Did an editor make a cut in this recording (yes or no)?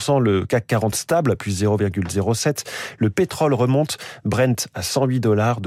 no